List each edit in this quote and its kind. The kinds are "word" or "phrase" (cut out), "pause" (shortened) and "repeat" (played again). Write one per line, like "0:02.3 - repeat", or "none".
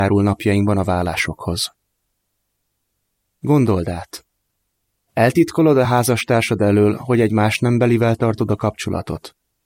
none